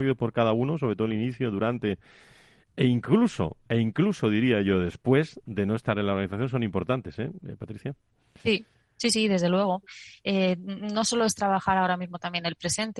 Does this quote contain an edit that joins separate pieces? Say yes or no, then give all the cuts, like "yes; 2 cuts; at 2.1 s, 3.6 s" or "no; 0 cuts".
no; 0 cuts